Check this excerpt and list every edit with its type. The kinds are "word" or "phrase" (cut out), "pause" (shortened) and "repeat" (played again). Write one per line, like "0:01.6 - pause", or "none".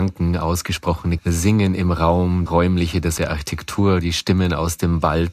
0:01.2 - word
0:02.5 - word
0:03.2 - word

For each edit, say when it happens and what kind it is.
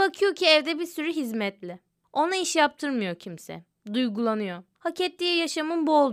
none

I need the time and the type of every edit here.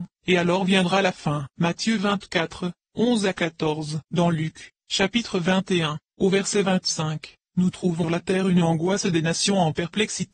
0:01.5 - pause
0:04.0 - pause
0:08.0 - phrase

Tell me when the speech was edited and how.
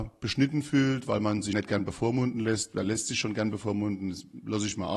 0:01.5 - word

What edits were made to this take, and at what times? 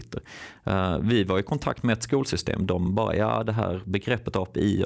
none

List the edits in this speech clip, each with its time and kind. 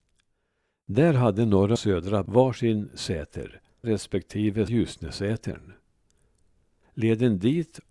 0:01.8 - word
0:02.3 - word
0:03.8 - word
0:04.7 - word

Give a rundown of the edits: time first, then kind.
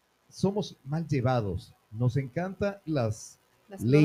0:02.9 - word

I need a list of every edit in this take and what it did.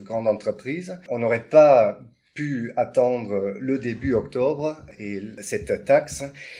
none

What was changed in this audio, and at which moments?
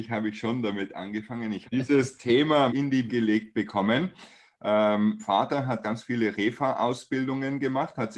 0:01.7 - word
0:02.7 - word
0:03.1 - word
0:05.2 - word
0:05.8 - word

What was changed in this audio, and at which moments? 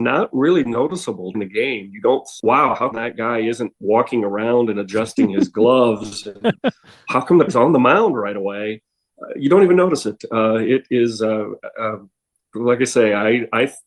0:01.3 - word
0:02.4 - word
0:02.9 - word
0:07.5 - word
0:12.5 - word

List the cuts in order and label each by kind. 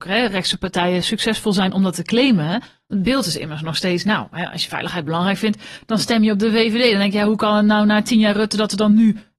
none

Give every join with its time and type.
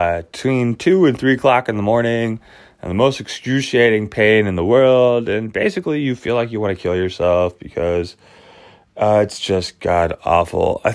none

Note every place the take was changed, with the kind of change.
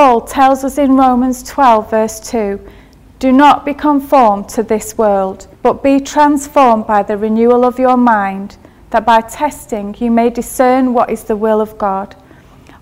0:05.5 - pause

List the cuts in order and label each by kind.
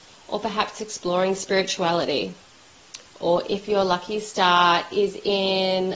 none

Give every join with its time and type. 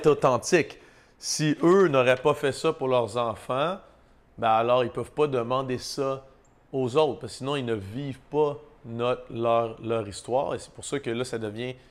none

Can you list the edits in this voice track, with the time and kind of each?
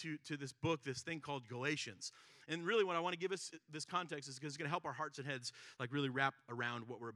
none

